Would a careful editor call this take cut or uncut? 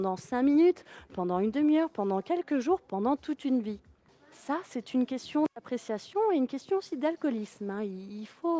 cut